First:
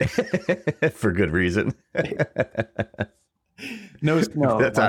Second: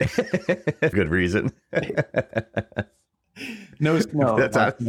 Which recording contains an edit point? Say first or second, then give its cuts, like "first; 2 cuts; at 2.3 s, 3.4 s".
second; 1 cut; at 0.9 s